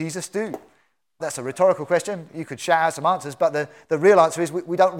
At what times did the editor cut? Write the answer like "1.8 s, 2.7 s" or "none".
1.2 s